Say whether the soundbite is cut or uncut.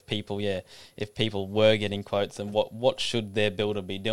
uncut